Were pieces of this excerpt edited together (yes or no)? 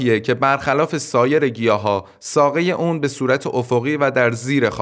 no